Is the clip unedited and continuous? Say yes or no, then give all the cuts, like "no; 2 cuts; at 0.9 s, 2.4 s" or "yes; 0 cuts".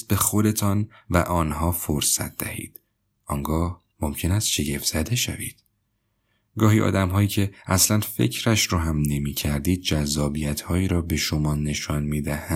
no; 1 cut; at 3.9 s